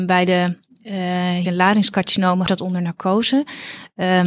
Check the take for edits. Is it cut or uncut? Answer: cut